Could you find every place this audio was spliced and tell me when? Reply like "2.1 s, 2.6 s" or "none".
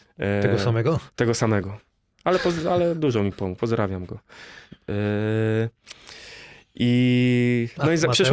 none